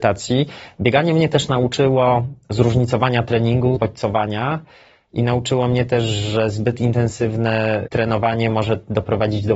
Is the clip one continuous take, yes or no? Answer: no